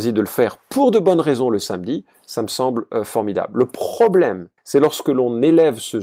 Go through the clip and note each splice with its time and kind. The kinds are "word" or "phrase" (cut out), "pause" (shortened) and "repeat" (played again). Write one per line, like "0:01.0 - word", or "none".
0:04.6 - pause